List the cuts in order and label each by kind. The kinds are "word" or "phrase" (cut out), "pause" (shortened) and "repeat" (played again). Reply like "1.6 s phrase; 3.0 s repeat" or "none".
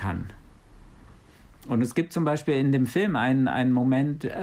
none

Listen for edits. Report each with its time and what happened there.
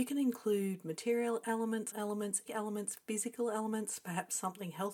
1.9 s word; 2.5 s word

